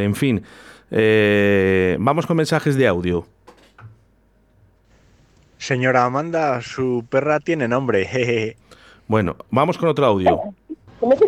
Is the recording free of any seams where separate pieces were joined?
no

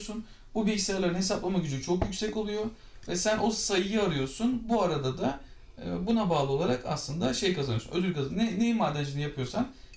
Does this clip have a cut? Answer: no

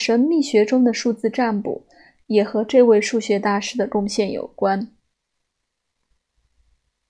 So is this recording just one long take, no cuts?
yes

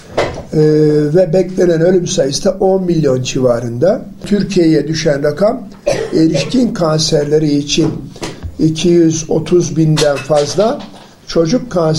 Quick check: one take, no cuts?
yes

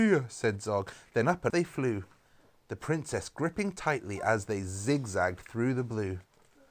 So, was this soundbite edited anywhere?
yes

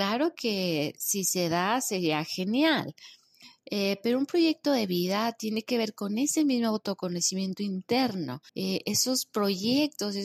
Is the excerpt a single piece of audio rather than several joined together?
no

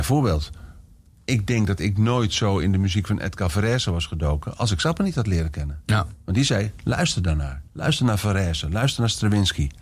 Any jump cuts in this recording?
yes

